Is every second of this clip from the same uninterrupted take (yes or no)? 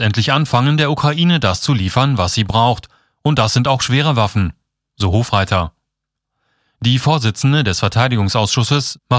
yes